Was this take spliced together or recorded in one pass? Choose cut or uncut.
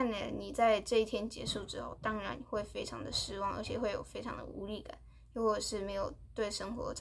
uncut